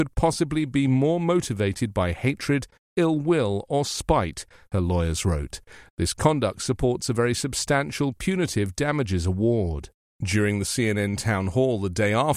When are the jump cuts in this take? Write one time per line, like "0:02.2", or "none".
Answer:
none